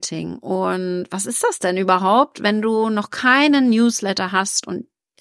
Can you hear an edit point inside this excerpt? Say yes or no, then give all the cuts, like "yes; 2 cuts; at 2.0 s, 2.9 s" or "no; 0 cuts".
no; 0 cuts